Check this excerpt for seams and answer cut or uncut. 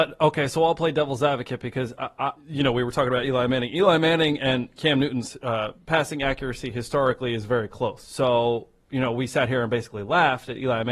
uncut